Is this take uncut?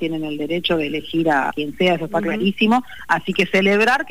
no; 1 cut; at 1.5 s

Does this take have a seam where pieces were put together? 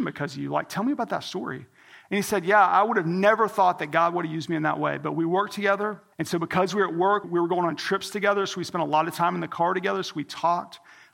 yes; 2 cuts; at 6.1 s, 7.2 s

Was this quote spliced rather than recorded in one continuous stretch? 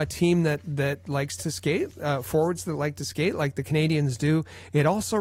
no; 0 cuts

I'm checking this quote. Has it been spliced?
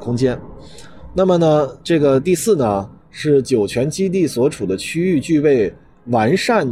no; 0 cuts

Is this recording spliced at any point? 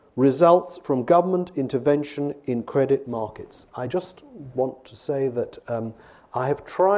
no; 0 cuts

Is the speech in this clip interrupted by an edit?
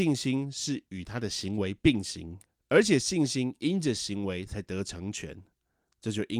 yes; 1 cut; at 2.5 s

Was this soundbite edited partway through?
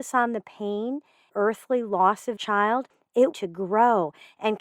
yes; 3 cuts; at 1.3 s, 2.4 s, 3.3 s

